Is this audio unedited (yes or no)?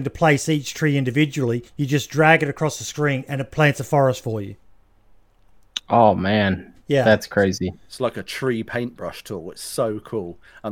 no